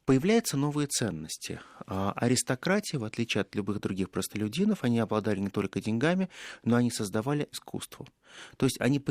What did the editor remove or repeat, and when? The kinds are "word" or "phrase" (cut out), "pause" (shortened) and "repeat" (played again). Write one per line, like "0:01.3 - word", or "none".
0:07.5 - word